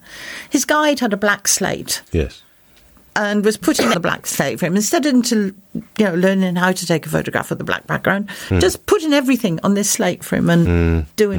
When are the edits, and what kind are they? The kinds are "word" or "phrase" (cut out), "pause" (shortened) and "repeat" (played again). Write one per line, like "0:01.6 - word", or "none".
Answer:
0:03.9 - phrase